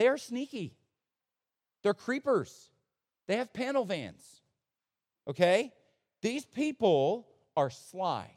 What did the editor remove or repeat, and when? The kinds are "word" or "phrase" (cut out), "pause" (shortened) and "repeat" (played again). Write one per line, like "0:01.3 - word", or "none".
none